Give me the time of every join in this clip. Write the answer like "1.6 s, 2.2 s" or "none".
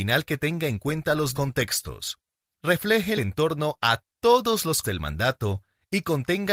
1.3 s, 3.2 s, 4.8 s